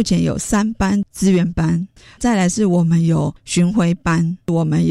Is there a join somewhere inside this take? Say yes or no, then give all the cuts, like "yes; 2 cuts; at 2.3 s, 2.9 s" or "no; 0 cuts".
no; 0 cuts